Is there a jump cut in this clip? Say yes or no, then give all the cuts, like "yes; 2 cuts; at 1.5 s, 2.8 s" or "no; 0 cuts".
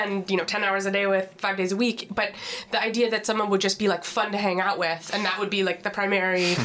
no; 0 cuts